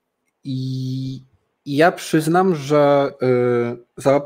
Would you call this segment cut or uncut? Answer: uncut